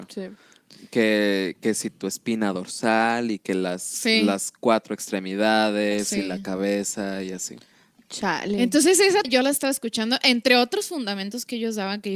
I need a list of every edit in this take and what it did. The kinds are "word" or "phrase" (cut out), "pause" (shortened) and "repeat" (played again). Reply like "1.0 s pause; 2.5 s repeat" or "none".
9.2 s word